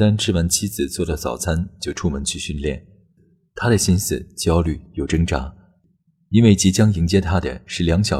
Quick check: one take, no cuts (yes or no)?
yes